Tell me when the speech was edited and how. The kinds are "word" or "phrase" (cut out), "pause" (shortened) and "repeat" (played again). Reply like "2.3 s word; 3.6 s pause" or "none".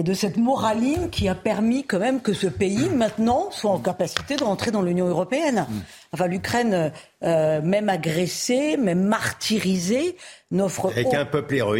none